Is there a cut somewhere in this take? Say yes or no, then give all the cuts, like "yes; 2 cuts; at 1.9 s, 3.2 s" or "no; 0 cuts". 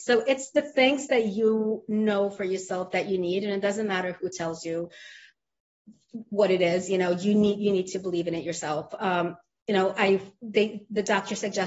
no; 0 cuts